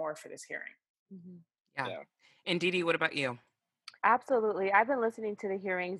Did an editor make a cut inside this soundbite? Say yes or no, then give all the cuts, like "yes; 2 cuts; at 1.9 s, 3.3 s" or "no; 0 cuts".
yes; 1 cut; at 4.0 s